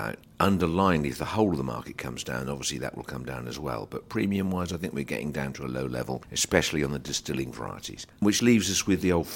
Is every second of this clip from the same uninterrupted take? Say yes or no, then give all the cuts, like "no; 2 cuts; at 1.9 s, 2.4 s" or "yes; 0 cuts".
no; 1 cut; at 8.4 s